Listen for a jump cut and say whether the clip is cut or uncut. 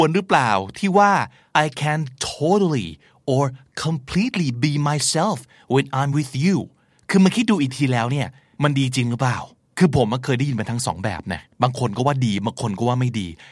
uncut